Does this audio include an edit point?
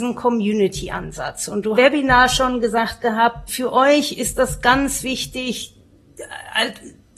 yes; 2 cuts; at 1.8 s, 3.5 s

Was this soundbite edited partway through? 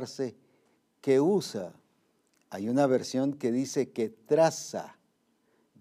no; 0 cuts

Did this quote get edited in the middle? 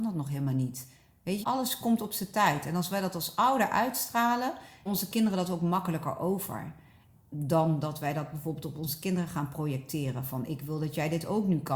yes; 2 cuts; at 1.4 s, 4.9 s

